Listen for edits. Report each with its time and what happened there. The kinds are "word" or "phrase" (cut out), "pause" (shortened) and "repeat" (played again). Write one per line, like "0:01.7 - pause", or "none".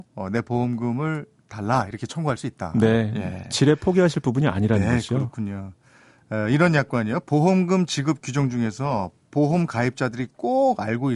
none